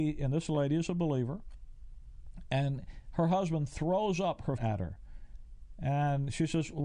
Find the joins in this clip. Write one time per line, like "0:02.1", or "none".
0:04.6